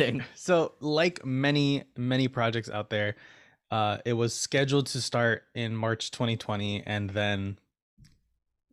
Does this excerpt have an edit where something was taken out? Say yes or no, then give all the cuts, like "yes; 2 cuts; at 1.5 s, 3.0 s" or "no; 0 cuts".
no; 0 cuts